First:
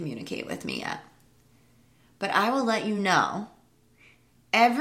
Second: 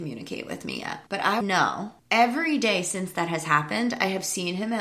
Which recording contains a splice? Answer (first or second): second